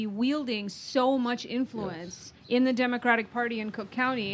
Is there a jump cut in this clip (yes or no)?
yes